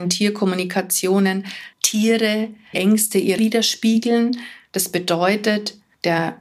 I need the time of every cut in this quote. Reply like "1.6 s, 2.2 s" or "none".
1.7 s, 2.7 s, 3.4 s